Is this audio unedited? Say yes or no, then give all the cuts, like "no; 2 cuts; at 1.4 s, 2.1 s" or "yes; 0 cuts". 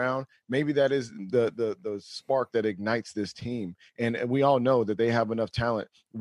yes; 0 cuts